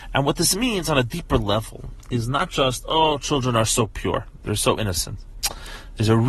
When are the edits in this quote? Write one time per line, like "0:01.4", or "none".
none

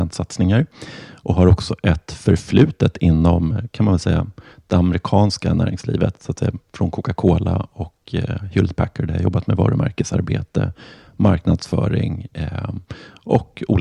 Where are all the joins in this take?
none

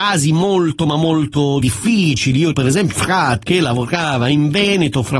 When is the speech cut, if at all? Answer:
0:01.6
0:02.5
0:02.9
0:03.4

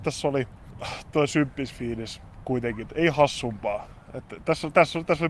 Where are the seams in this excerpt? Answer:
0:01.1
0:02.9

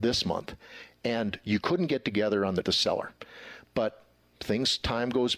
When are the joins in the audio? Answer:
0:02.6

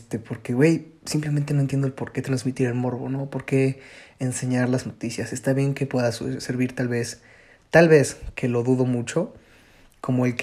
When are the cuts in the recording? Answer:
0:04.8

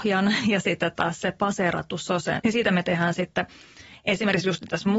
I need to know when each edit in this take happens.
0:02.4

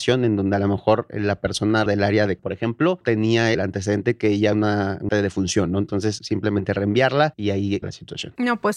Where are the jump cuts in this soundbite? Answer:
0:01.9
0:02.4
0:03.0
0:03.5
0:04.5
0:05.1
0:06.2
0:07.8

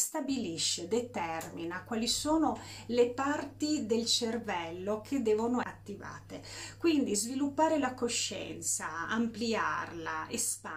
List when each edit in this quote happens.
0:05.6

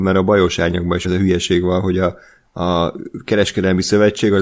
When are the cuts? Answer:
0:01.0

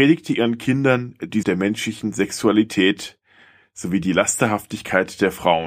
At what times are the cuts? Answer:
0:01.4

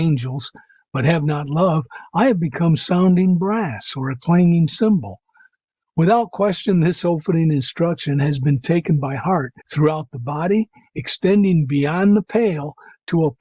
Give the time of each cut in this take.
0:09.6

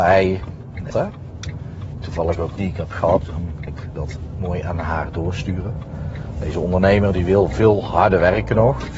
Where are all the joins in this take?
0:00.9
0:02.6
0:03.2
0:03.7

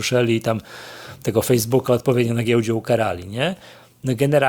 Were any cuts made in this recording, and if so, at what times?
none

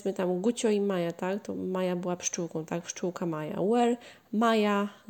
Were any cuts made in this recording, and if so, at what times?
none

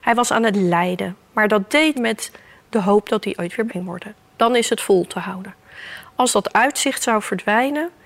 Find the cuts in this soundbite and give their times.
0:01.9
0:03.7

